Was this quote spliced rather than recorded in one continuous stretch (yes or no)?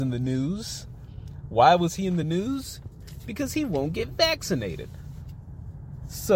no